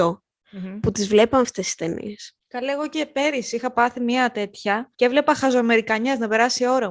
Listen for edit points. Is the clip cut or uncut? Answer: cut